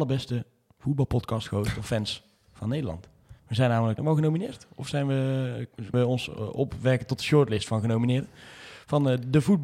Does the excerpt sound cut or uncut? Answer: cut